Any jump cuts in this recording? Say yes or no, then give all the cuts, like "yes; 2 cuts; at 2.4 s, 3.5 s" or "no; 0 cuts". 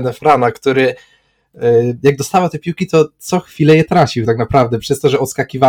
no; 0 cuts